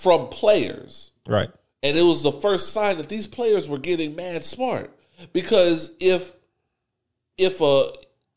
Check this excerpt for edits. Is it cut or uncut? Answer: uncut